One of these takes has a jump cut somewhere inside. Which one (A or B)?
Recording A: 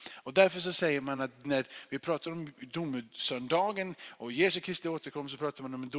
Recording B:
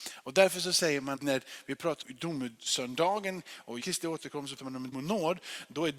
B